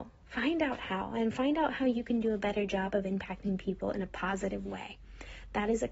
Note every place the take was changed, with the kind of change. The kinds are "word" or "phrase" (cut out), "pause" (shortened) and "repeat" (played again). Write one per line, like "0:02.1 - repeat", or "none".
none

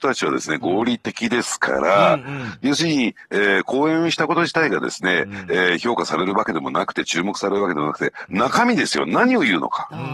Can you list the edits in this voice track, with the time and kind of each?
none

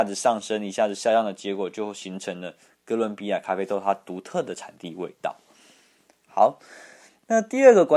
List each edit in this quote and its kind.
none

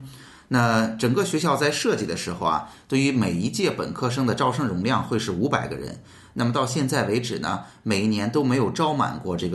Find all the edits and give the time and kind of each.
none

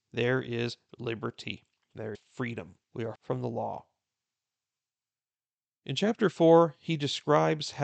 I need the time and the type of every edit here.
0:02.1 - word
0:02.8 - pause
0:03.2 - word

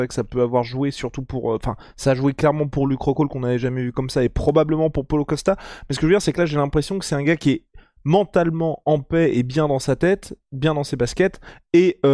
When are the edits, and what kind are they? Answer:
none

